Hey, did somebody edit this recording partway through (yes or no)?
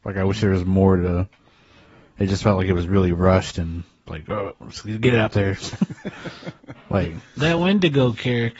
no